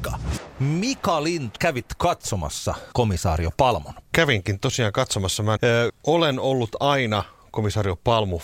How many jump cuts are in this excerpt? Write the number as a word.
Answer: five